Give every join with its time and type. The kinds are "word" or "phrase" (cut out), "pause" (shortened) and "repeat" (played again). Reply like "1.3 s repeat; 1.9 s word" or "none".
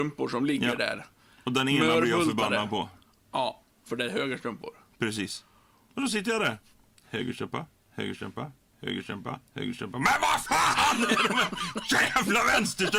9.5 s pause